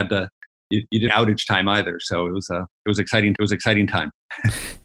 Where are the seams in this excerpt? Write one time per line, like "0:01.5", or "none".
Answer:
0:01.1
0:02.7
0:03.4